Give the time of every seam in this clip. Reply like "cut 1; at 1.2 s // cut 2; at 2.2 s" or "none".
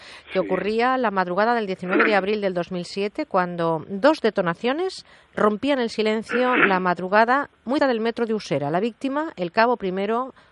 cut 1; at 7.8 s